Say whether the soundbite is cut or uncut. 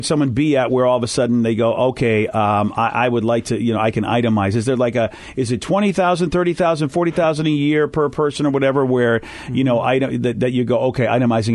uncut